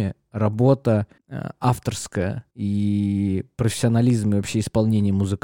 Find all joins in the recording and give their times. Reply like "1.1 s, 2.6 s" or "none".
1.2 s, 2.5 s